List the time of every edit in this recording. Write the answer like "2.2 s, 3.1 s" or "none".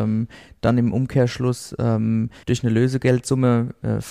2.4 s